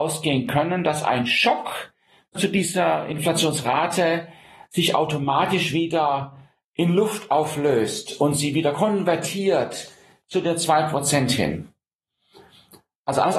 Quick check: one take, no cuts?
no; 1 cut; at 2.4 s

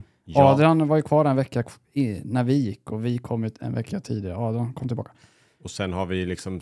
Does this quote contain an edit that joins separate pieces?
no; 0 cuts

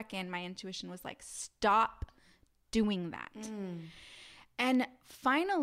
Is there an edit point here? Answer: no; 0 cuts

